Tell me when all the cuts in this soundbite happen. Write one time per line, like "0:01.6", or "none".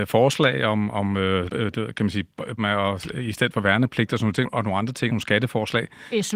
0:01.5
0:02.6
0:04.4
0:05.1